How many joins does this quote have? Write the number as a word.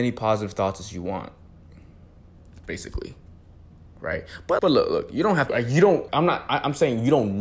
three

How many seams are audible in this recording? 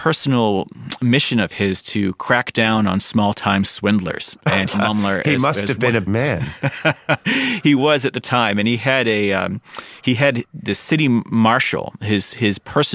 three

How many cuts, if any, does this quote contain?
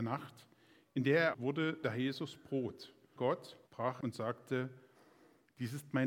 five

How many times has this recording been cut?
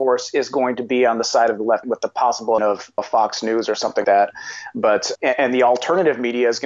five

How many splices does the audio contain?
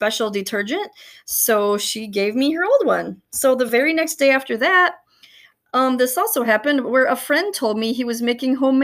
zero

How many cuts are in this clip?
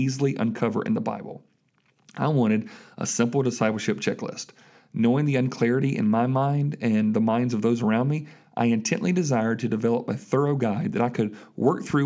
zero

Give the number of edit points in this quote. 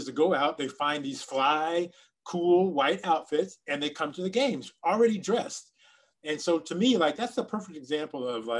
zero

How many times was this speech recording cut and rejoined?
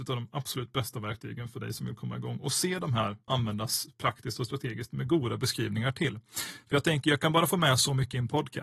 one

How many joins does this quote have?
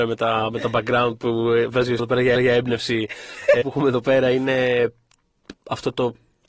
four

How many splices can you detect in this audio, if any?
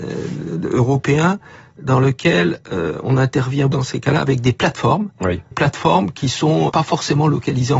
three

